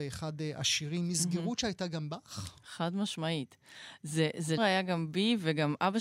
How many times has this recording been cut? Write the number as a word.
one